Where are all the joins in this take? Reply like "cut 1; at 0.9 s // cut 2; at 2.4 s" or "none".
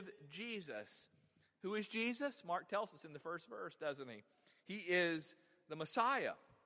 none